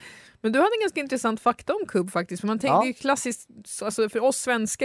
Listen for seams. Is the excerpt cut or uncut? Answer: uncut